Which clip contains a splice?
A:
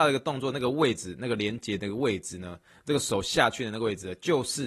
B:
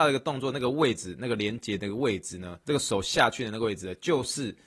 B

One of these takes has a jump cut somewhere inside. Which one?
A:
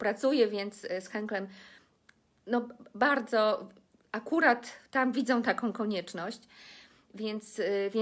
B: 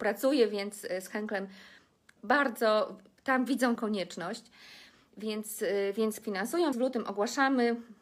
B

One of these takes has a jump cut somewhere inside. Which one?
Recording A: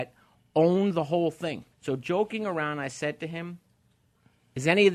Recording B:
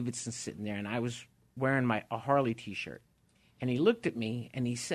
A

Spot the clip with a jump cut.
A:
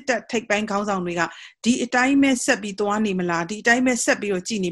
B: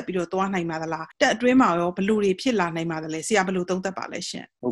B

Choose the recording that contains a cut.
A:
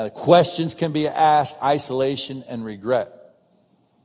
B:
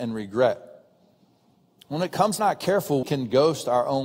B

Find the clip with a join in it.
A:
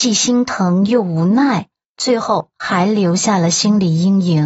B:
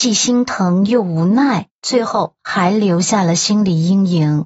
B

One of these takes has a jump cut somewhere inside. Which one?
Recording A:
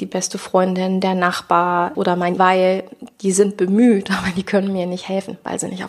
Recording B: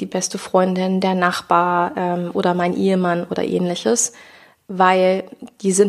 A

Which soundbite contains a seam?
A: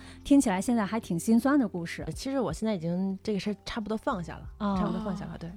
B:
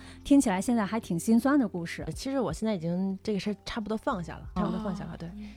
B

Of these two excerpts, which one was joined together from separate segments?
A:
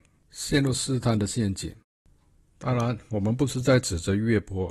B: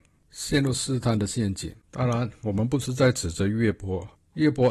B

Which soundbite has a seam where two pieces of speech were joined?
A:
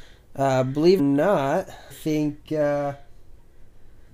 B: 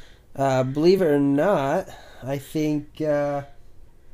A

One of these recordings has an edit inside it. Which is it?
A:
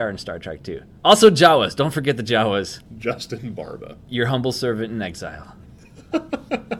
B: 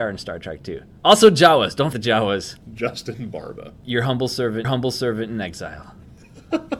B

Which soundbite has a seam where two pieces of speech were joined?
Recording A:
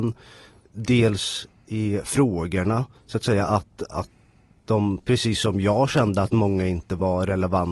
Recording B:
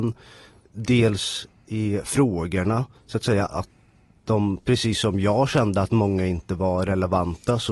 B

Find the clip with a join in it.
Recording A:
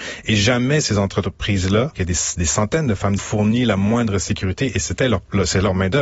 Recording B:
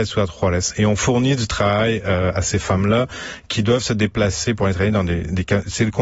A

